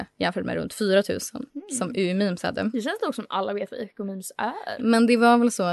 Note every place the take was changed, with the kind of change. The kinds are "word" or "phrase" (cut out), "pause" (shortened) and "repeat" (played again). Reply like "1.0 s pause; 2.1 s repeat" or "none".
1.5 s pause